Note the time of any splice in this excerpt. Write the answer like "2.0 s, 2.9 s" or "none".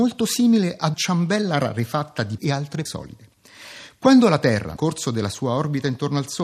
0.9 s, 2.4 s, 2.9 s, 4.8 s